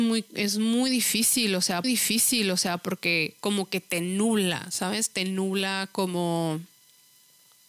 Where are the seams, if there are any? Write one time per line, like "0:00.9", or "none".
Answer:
0:01.8

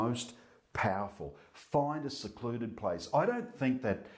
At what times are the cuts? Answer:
none

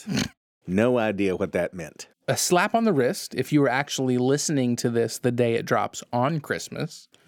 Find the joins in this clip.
none

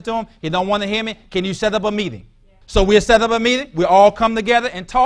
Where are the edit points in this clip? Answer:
0:02.6

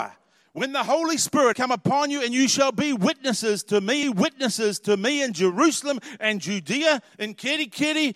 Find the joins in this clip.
0:01.5
0:04.0
0:07.1

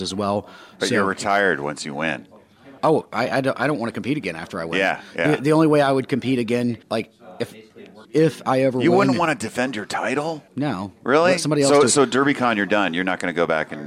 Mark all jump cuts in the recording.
0:02.8
0:06.8
0:08.0
0:10.5

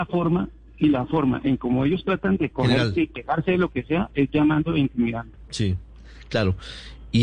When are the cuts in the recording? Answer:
none

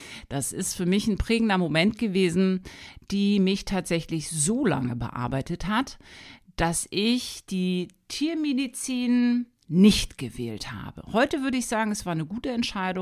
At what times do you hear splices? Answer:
0:09.5

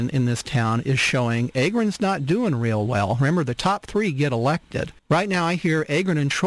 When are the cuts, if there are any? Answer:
0:05.0

